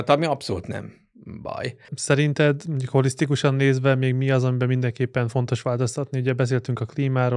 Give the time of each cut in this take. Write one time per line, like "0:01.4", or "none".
0:01.8